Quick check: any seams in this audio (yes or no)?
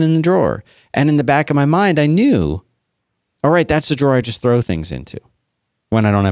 no